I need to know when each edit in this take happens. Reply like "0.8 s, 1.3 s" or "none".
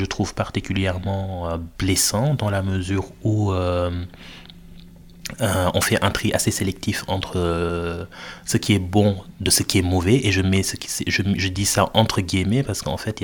none